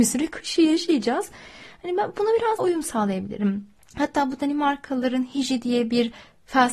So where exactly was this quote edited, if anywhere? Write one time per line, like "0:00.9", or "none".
0:02.6
0:03.8